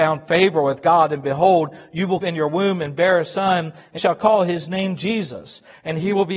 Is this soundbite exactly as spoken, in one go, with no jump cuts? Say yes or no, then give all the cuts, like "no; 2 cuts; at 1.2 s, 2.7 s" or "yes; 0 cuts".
no; 2 cuts; at 2.2 s, 4.0 s